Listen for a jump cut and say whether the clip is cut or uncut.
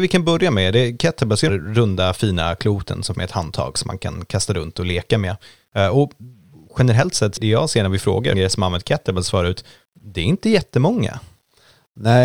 cut